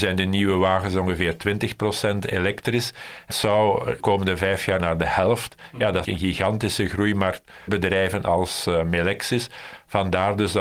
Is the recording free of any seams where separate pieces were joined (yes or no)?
no